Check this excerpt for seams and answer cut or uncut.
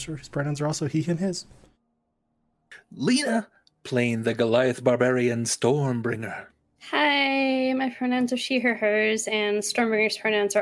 uncut